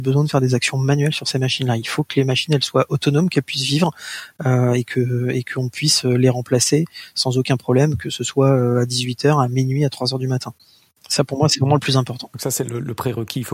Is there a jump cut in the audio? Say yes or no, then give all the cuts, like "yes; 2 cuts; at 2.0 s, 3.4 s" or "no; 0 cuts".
no; 0 cuts